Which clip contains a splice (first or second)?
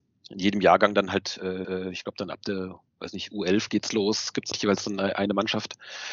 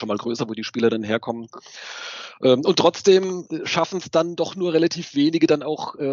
first